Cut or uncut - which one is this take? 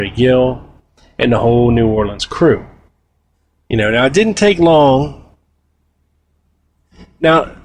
cut